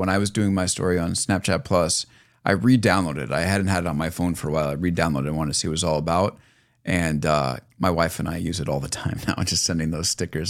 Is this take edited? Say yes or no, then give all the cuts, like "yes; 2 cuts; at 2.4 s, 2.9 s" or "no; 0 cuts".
no; 0 cuts